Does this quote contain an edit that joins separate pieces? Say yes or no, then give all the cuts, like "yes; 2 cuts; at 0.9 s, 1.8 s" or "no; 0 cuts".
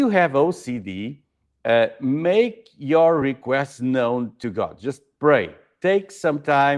no; 0 cuts